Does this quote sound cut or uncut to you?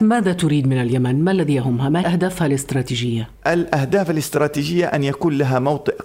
cut